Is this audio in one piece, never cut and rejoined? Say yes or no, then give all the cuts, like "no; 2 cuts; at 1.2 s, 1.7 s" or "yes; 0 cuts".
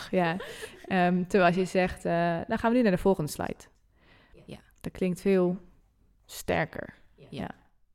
yes; 0 cuts